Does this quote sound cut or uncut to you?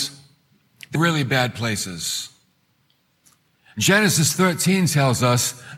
cut